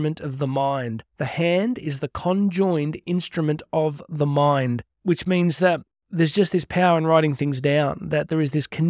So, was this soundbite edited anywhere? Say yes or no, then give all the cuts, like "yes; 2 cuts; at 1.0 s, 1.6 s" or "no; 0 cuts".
yes; 2 cuts; at 1.1 s, 4.9 s